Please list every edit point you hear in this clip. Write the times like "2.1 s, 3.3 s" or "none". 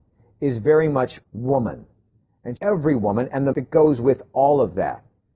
1.2 s, 2.6 s, 3.5 s